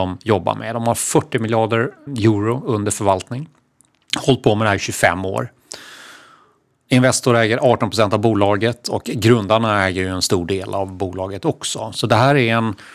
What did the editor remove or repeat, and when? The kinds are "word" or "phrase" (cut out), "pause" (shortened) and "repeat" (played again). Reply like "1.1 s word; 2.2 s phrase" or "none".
2.1 s word